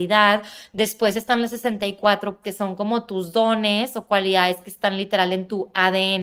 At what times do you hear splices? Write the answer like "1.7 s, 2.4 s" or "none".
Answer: 2.4 s